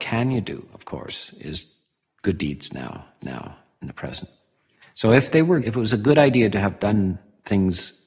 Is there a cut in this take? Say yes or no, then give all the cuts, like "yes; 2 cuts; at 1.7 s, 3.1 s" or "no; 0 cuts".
yes; 2 cuts; at 3.2 s, 5.6 s